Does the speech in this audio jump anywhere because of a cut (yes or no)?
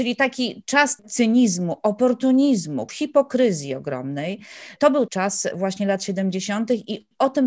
yes